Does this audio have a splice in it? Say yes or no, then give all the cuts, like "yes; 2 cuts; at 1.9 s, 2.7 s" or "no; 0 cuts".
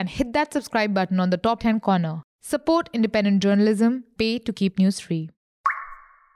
yes; 2 cuts; at 1.6 s, 4.2 s